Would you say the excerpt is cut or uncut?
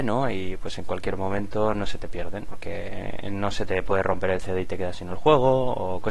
cut